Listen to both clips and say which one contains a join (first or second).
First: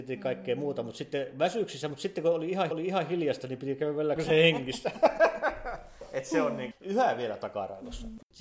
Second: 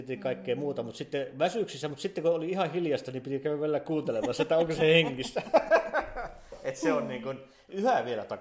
first